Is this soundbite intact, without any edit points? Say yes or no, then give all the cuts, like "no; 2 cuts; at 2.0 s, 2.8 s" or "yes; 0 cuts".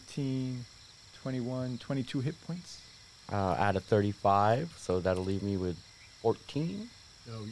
yes; 0 cuts